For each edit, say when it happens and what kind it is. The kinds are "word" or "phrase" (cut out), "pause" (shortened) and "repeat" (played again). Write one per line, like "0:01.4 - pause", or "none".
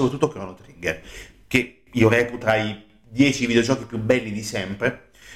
0:02.4 - word